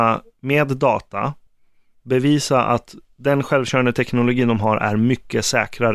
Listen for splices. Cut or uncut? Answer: uncut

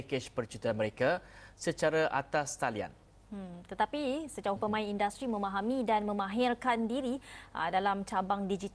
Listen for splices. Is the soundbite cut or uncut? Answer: cut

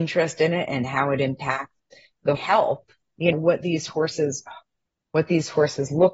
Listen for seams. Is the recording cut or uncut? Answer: cut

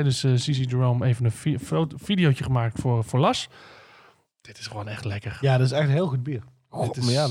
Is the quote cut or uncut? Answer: uncut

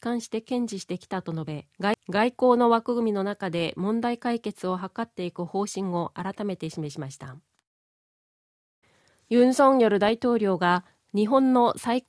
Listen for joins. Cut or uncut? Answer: cut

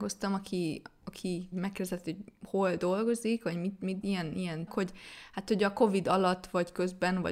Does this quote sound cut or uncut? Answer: cut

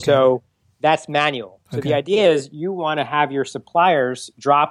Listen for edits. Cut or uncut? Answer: cut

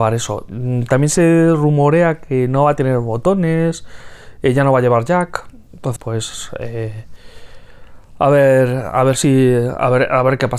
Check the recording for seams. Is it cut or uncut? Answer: cut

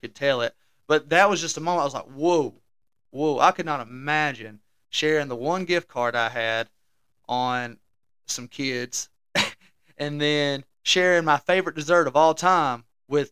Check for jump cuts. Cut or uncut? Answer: uncut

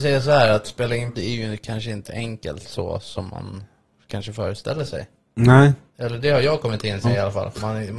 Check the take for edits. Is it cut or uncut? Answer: cut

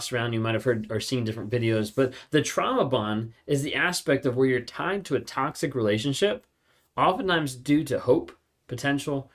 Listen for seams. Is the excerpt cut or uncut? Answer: uncut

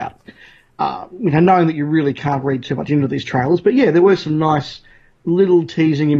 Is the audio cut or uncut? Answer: uncut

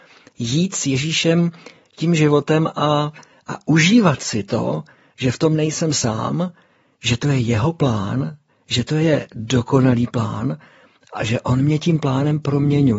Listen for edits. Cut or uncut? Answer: uncut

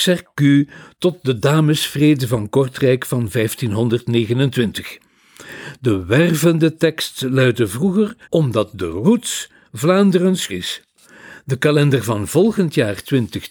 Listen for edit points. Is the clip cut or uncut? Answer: cut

